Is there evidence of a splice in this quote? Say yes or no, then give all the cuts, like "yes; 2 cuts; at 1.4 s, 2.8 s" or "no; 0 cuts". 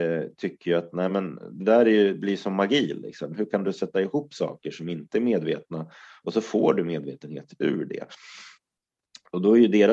no; 0 cuts